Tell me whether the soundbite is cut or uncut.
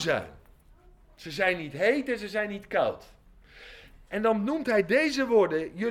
uncut